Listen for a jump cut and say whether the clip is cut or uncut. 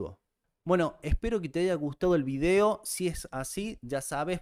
uncut